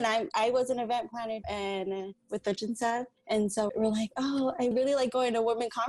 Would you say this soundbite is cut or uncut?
cut